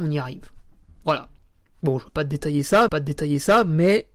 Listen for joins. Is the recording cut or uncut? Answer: cut